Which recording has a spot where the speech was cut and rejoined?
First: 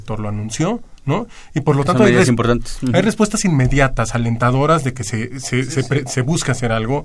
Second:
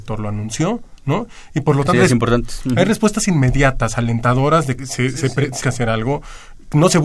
second; 3 cuts; at 1.9 s, 4.8 s, 5.6 s

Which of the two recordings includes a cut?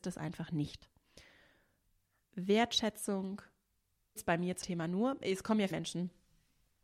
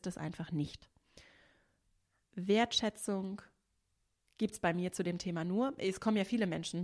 first; 3 cuts; at 4.2 s, 4.6 s, 5.7 s

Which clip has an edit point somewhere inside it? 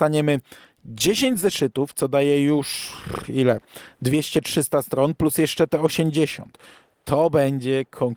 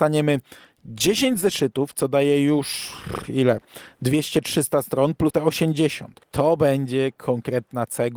second; 2 cuts; at 5.3 s, 6.2 s

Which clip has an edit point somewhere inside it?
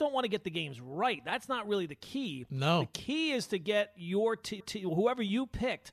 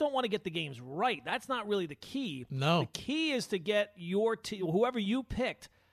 first; 1 cut; at 4.6 s

